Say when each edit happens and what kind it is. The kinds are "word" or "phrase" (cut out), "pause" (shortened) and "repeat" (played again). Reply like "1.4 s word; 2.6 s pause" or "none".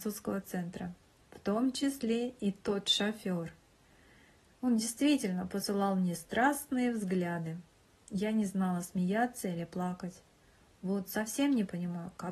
none